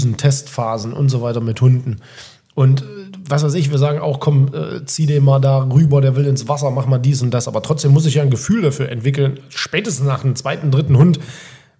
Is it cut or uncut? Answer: uncut